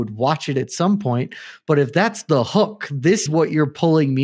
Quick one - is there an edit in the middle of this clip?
yes; 1 cut; at 3.3 s

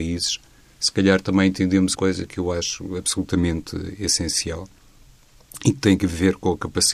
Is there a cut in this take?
yes; 1 cut; at 1.9 s

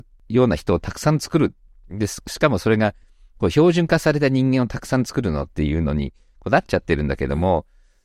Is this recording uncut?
yes; 0 cuts

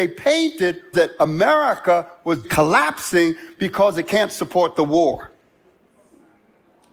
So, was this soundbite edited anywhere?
yes; 2 cuts; at 0.9 s, 2.4 s

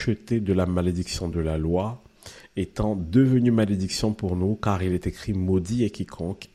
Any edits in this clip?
no; 0 cuts

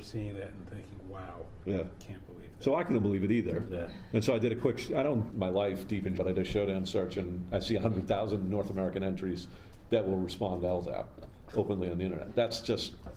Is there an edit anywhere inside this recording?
yes; 3 cuts; at 1.6 s, 5.3 s, 6.2 s

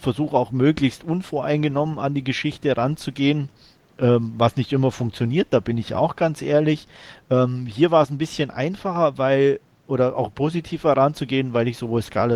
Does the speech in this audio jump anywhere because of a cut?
no; 0 cuts

